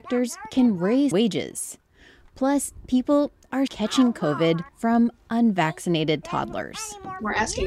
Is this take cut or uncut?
cut